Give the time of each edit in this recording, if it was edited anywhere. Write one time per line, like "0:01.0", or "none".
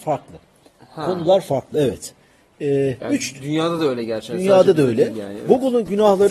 none